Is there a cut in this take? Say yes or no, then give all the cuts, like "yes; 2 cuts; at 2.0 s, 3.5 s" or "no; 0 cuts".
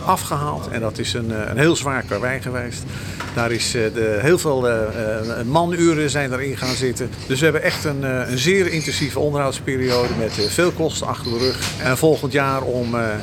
no; 0 cuts